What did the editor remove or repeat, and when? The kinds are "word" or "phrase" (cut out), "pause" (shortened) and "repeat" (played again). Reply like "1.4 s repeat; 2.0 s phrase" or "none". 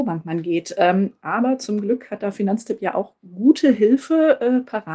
none

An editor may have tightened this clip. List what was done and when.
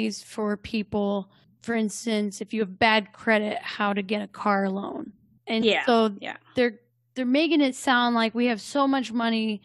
none

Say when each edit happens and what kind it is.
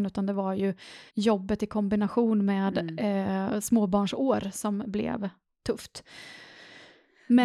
1.1 s pause

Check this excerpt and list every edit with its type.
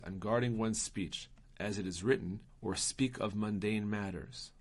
2.5 s pause

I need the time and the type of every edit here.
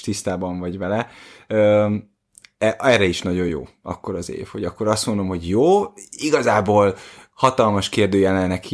none

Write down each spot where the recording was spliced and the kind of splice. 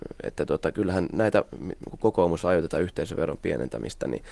none

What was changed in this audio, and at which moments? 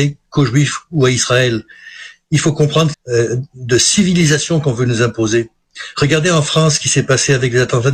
2.9 s phrase

